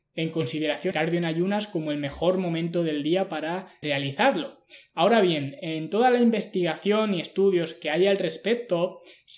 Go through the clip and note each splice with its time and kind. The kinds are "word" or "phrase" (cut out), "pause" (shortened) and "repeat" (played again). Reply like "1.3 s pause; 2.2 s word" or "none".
0.9 s word; 3.8 s word